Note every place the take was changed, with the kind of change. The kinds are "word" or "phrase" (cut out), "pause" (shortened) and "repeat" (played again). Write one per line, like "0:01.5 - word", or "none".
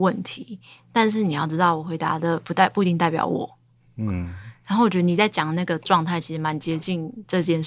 none